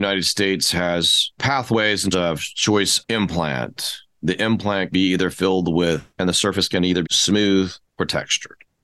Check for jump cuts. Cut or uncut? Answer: cut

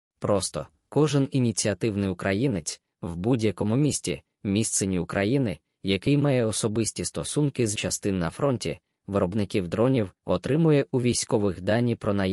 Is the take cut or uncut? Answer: cut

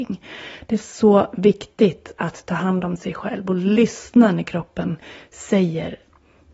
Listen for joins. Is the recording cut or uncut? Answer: uncut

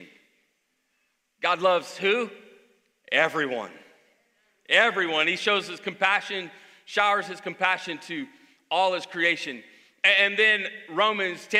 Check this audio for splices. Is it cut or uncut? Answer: uncut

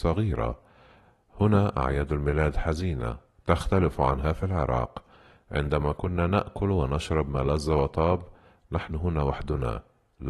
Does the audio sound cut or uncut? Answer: uncut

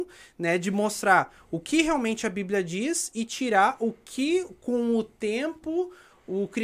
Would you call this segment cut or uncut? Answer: uncut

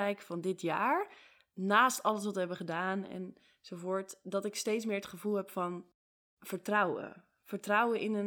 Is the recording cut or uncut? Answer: uncut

